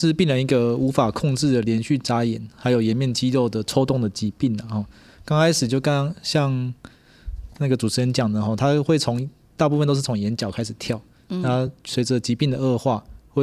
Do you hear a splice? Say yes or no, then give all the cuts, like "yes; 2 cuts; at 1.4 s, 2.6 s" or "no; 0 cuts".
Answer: no; 0 cuts